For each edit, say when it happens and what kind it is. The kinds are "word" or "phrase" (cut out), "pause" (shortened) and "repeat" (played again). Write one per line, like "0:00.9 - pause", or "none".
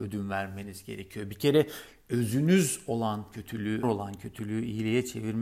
0:03.8 - phrase